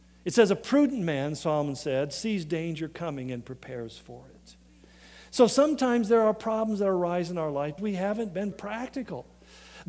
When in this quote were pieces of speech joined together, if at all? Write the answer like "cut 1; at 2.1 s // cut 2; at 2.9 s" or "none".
cut 1; at 7.8 s // cut 2; at 8.5 s